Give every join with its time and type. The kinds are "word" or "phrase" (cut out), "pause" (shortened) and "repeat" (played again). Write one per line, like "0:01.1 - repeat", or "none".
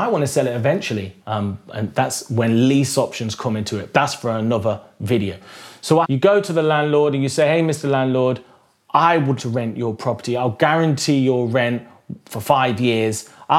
0:01.2 - pause
0:03.9 - word
0:06.0 - phrase
0:09.4 - word